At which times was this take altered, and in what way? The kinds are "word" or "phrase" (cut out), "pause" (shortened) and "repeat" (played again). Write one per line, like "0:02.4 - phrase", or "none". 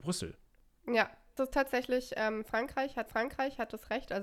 0:01.4 - word
0:03.1 - repeat